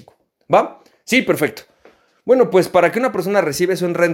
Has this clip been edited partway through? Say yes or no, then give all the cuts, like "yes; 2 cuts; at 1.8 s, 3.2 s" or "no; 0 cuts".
no; 0 cuts